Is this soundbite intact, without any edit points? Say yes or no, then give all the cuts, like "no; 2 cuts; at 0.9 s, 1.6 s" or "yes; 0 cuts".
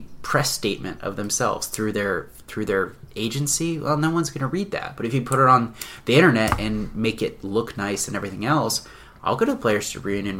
yes; 0 cuts